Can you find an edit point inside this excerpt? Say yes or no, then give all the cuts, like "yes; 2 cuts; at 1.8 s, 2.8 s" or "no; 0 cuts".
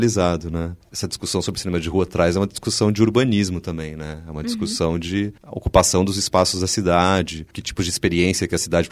yes; 1 cut; at 7.5 s